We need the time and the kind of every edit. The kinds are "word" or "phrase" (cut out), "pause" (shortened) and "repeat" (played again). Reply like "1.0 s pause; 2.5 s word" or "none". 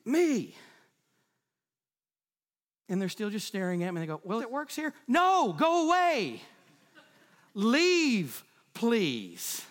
4.4 s phrase